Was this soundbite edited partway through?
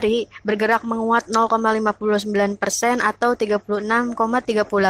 no; 0 cuts

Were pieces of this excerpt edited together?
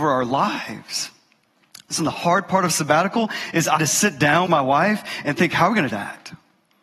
yes; 4 cuts; at 2.0 s, 3.8 s, 4.5 s, 5.9 s

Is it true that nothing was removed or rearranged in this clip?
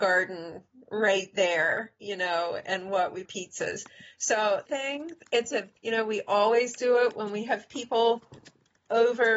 no; 3 cuts; at 3.3 s, 4.7 s, 5.8 s

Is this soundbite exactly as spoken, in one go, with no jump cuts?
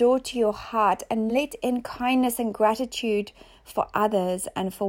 yes; 0 cuts

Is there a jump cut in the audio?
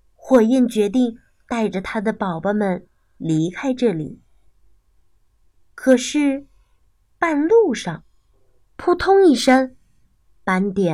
no; 0 cuts

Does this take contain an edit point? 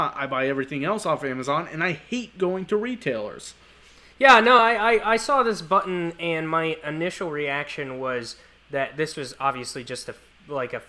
no; 0 cuts

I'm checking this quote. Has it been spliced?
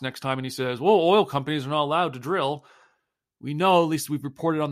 no; 0 cuts

